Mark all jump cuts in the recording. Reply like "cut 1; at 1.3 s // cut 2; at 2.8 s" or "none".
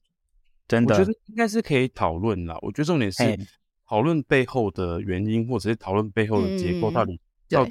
none